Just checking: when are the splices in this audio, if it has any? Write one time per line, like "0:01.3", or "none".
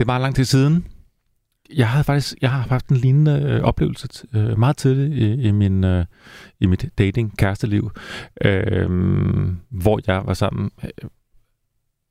none